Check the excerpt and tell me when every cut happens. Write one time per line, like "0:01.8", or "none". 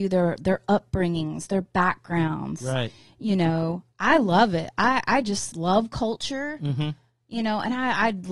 0:03.9